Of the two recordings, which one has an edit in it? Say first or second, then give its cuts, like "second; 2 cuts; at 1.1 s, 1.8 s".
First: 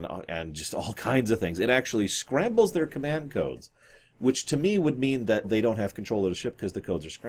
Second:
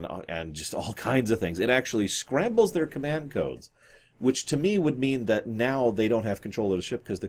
first; 1 cut; at 5.4 s